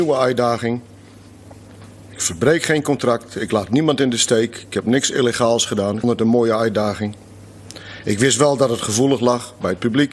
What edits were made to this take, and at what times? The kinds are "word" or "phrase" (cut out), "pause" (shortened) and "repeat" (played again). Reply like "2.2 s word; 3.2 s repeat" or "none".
6.0 s word